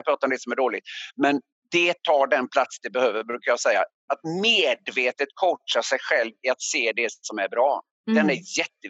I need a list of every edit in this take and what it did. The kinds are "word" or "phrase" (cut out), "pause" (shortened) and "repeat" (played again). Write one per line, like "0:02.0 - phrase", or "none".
none